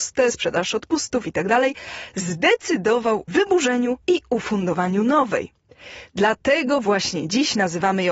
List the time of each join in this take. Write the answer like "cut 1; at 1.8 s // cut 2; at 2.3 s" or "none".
cut 1; at 3.3 s // cut 2; at 4.0 s